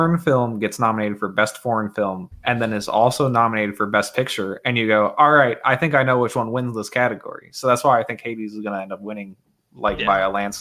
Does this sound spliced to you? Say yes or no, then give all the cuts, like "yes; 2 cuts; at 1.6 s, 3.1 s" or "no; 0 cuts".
no; 0 cuts